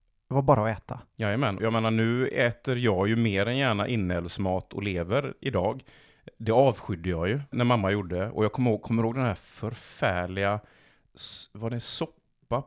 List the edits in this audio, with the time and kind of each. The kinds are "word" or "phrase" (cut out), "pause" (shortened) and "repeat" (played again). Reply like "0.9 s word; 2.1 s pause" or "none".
1.6 s word; 7.5 s word